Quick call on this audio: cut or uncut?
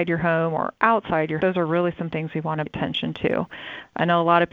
cut